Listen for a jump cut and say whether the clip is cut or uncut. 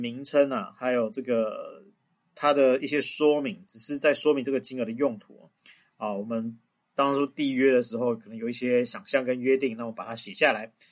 uncut